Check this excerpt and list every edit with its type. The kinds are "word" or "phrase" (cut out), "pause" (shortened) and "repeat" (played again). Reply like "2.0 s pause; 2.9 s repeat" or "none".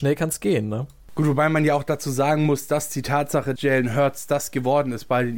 3.6 s word